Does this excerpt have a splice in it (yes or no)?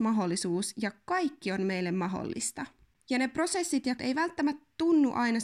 yes